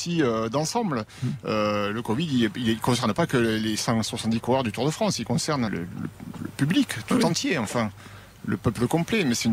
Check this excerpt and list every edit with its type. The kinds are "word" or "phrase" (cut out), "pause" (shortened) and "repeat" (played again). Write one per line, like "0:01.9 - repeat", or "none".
0:05.7 - word

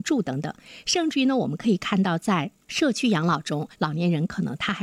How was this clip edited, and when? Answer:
0:03.7 - pause

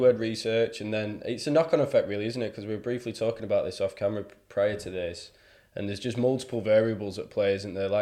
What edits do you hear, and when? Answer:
none

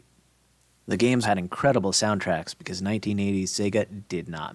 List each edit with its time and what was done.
0:01.2 - word

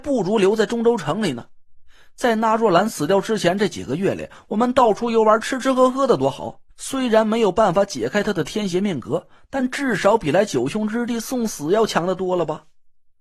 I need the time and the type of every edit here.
0:06.7 - pause

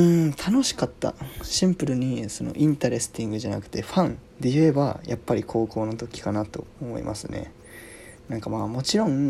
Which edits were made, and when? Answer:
0:04.3 - pause

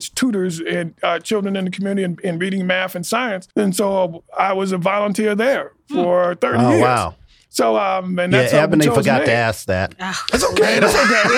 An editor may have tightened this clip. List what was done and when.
0:03.5 - pause

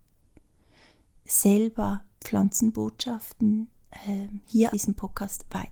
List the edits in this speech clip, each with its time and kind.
0:02.1 - pause
0:04.7 - word

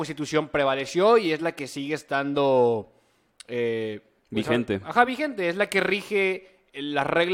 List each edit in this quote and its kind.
none

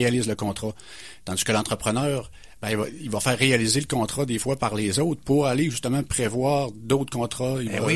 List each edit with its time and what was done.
none

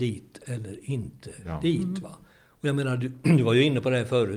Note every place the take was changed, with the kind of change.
none

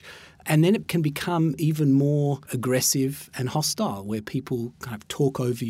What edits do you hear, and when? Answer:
0:02.4 - pause

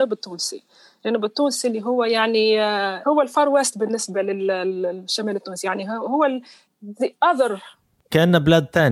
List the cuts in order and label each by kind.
none

